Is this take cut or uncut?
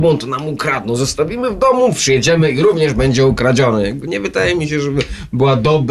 uncut